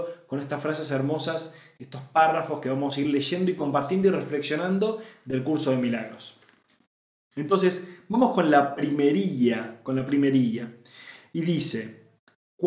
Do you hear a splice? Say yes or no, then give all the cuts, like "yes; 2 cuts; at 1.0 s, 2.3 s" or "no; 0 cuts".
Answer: no; 0 cuts